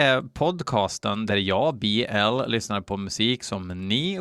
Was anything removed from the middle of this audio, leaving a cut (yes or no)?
no